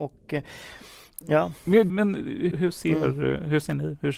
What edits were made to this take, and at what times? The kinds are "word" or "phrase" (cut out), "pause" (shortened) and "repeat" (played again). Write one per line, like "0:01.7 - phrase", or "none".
0:01.9 - word
0:02.5 - word